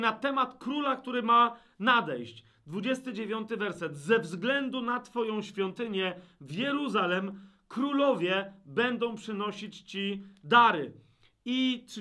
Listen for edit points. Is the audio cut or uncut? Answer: uncut